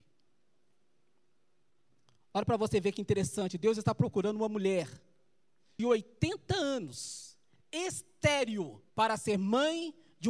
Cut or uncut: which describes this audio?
cut